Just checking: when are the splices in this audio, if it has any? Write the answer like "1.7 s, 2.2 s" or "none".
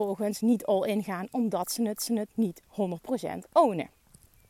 2.0 s